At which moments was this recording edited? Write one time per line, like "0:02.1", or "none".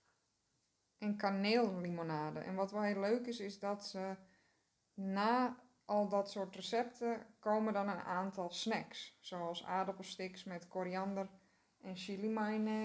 none

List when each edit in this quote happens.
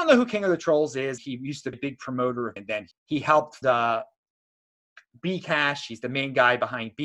0:01.2
0:01.7
0:02.6
0:02.9
0:03.6

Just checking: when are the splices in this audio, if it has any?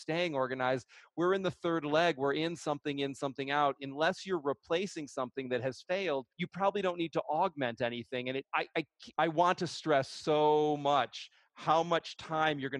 0:06.3
0:08.4
0:09.1

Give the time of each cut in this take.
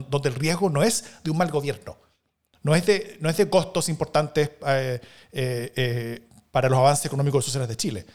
none

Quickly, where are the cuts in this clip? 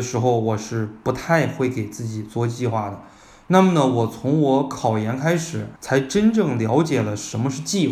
0:05.8

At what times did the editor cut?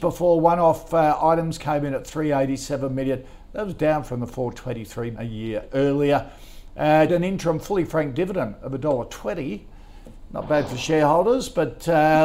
0:05.1
0:07.1

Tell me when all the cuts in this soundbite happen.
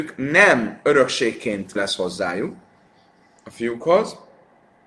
0:01.7

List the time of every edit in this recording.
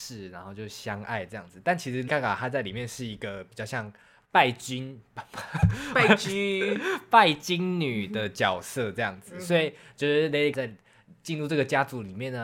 0:02.1
0:10.5

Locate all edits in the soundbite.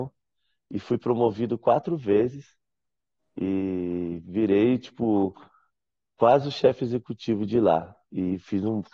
none

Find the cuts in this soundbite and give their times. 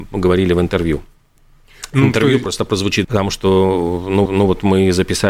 0:03.0
0:04.3

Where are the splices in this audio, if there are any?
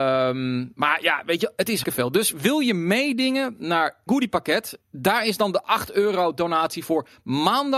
0:01.8
0:04.1
0:04.8

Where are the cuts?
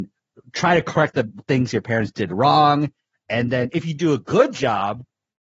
none

